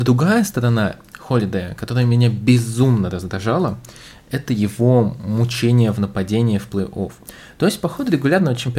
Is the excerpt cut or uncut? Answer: uncut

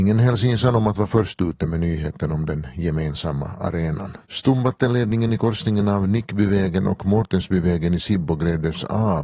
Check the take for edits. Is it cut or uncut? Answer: cut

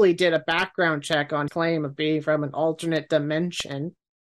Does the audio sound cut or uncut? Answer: cut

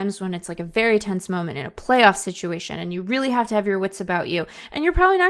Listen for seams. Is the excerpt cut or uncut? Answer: uncut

